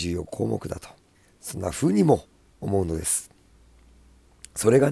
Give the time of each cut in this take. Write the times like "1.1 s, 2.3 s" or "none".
1.1 s, 2.3 s